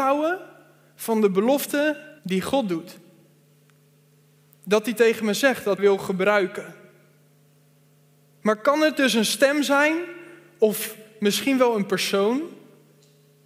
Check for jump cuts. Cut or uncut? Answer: cut